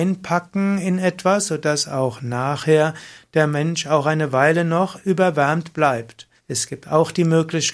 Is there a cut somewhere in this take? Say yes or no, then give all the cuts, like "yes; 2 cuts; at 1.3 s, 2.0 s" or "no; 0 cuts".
yes; 1 cut; at 6.4 s